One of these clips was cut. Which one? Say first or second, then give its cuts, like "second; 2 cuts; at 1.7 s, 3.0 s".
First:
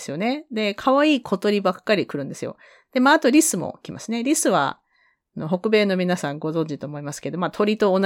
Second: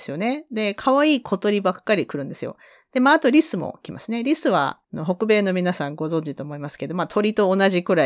second; 1 cut; at 4.8 s